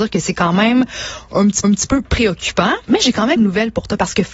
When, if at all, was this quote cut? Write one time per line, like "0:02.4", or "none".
0:01.6
0:02.8
0:03.4

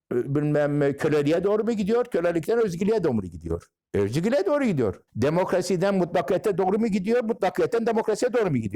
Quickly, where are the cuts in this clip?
0:03.8
0:05.1

